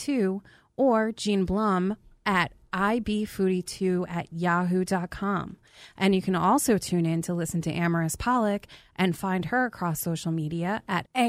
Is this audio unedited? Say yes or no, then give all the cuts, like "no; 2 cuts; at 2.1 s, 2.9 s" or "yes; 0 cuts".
yes; 0 cuts